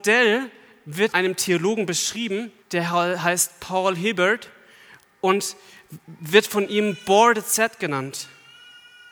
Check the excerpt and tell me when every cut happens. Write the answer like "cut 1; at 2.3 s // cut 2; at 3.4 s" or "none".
cut 1; at 1.1 s // cut 2; at 2.6 s